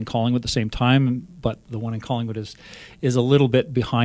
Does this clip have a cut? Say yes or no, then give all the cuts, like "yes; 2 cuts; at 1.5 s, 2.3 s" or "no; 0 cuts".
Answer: no; 0 cuts